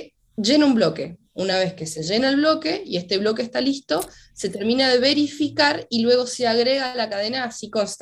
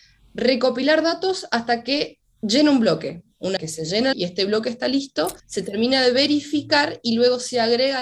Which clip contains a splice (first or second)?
second